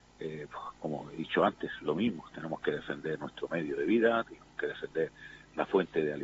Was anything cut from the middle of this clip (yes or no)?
no